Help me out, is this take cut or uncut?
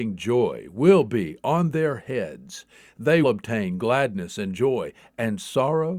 cut